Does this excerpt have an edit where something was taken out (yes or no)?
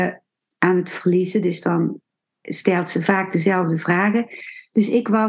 no